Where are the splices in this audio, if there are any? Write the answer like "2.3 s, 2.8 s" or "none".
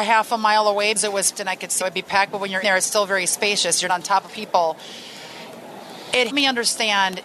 1.0 s, 1.3 s, 1.8 s, 2.6 s, 3.9 s, 4.3 s, 6.3 s